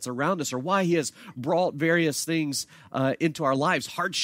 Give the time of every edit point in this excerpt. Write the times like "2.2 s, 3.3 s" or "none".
none